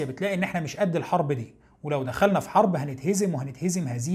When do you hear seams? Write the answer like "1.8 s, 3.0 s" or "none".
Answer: none